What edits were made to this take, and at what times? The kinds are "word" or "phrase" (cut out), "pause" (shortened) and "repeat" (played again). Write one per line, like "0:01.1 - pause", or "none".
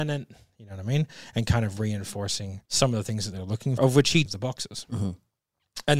0:02.6 - pause
0:03.8 - word
0:04.3 - phrase